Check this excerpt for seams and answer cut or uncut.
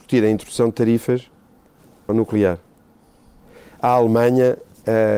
cut